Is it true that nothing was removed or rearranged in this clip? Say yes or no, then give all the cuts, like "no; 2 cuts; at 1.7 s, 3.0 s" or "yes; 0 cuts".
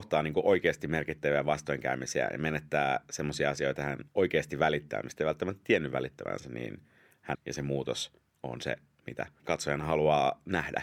no; 3 cuts; at 3.8 s, 4.1 s, 7.3 s